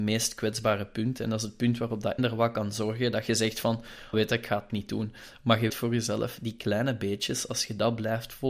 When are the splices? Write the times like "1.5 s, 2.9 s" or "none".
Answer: 2.2 s, 4.1 s, 4.7 s, 5.7 s